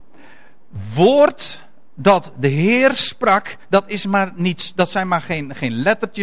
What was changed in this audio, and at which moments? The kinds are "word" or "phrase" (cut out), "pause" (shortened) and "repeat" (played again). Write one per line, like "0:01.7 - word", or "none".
none